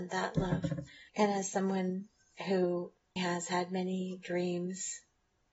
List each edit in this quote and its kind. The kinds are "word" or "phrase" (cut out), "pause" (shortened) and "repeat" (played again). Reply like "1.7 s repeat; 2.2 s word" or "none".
1.1 s pause; 3.2 s word

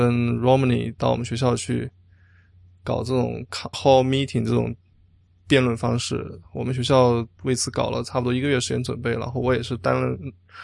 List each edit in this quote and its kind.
3.7 s word

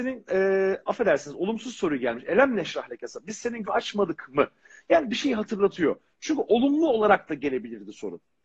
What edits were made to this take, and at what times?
3.6 s word

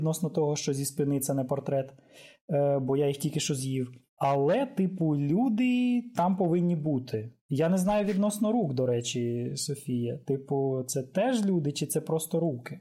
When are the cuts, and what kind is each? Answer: 4.1 s pause; 7.4 s pause

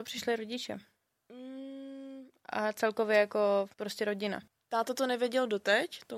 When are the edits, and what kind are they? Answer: 3.7 s pause; 4.5 s pause

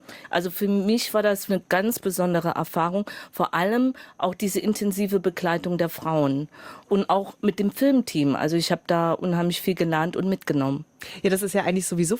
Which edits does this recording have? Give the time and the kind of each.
1.5 s word

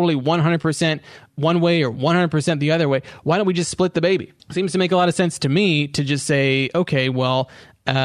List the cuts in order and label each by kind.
4.4 s pause

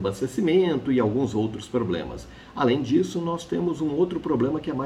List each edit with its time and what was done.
none

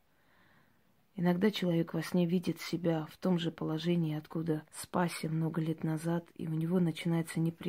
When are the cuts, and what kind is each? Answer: 4.7 s pause

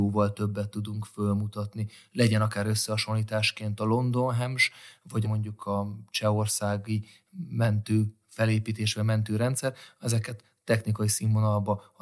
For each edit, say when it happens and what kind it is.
5.2 s word

